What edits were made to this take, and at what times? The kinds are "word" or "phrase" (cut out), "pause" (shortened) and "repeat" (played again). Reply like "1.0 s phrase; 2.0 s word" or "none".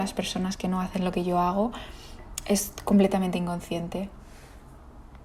none